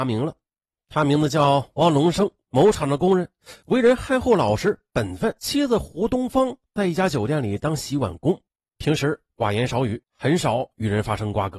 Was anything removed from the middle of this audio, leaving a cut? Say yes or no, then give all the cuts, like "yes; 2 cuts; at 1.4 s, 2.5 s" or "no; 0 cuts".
yes; 1 cut; at 5.4 s